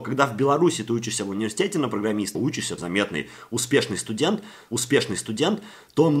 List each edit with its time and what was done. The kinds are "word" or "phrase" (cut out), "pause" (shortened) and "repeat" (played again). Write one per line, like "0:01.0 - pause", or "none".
0:02.3 - phrase
0:02.8 - phrase
0:04.7 - repeat